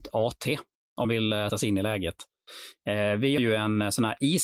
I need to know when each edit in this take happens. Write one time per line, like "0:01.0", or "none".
0:01.0
0:01.5
0:03.4